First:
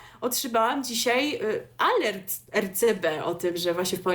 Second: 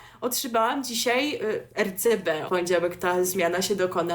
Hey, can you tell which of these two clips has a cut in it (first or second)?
second